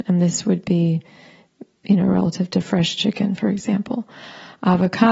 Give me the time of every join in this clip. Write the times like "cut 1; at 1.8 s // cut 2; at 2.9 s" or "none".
none